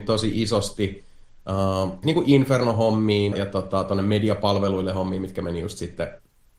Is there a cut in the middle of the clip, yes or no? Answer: yes